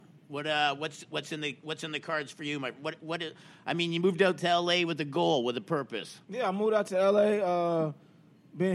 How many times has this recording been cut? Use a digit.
1